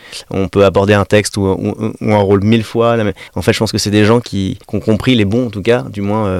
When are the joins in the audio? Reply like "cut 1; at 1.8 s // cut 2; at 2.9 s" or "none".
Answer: cut 1; at 3.3 s // cut 2; at 4.6 s